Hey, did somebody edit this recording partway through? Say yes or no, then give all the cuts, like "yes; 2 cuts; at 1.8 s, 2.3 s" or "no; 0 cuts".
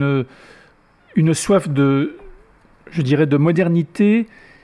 no; 0 cuts